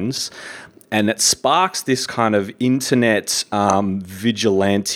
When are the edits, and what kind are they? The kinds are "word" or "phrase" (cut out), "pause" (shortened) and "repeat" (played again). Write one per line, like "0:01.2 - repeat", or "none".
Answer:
none